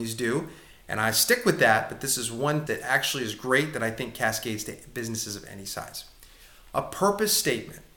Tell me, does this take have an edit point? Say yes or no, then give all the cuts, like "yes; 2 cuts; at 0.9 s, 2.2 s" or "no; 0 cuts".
yes; 1 cut; at 2.7 s